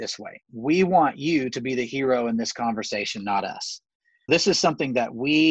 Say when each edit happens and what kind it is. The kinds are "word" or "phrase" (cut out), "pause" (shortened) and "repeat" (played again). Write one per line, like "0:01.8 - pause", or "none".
0:04.3 - word